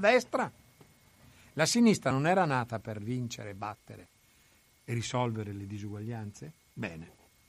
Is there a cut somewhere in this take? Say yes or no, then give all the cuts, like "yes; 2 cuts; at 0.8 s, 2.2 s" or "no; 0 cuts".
no; 0 cuts